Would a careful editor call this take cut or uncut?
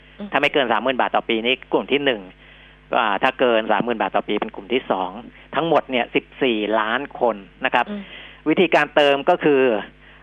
uncut